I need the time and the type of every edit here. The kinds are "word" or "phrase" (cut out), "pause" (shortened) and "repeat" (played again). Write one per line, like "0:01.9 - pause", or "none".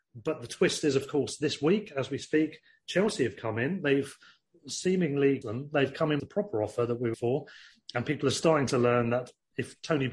0:05.4 - word
0:06.2 - word
0:07.1 - word